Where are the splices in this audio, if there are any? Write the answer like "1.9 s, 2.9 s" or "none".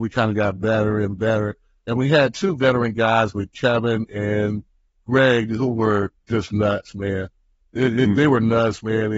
none